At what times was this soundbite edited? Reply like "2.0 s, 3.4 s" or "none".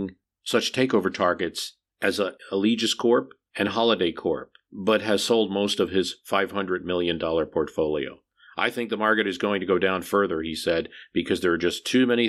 none